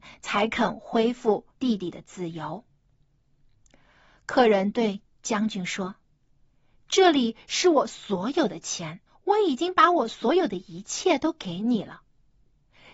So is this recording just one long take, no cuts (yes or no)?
no